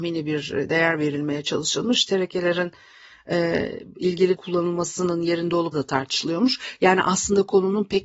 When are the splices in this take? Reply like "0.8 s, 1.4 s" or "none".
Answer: 4.3 s, 5.7 s